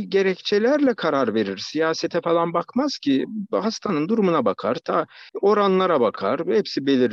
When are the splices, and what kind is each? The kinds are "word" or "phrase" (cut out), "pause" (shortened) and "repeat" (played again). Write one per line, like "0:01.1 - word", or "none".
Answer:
0:05.3 - pause